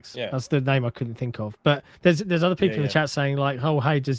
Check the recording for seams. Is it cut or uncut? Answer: cut